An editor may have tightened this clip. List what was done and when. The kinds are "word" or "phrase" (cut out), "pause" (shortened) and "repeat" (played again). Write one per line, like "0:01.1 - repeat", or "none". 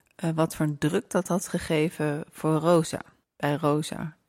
0:03.2 - pause